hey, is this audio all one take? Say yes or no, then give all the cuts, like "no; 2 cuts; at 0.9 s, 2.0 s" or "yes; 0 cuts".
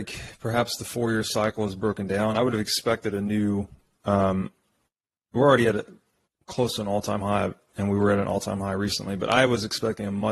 yes; 0 cuts